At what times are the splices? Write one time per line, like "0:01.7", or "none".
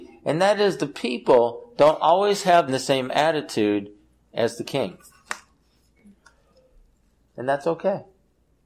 0:02.7